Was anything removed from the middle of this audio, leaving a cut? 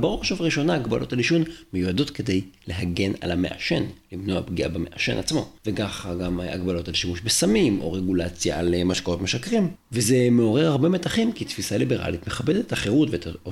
yes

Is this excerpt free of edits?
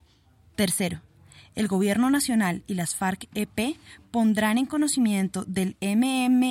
yes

